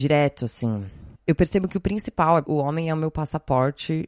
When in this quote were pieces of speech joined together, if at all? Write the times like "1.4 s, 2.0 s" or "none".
2.4 s